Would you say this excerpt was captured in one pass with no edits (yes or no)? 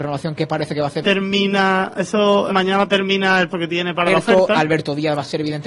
no